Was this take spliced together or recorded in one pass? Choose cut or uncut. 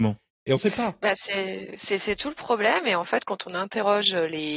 uncut